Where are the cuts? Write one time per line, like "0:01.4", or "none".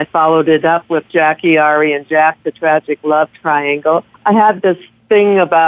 0:04.1